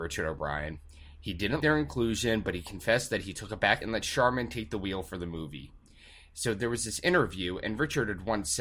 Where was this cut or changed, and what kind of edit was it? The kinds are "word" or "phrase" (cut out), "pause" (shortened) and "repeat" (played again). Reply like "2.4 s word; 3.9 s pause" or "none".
1.6 s word; 3.8 s word